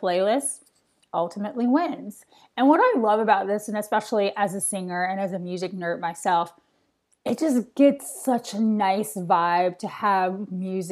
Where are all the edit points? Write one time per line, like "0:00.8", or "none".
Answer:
none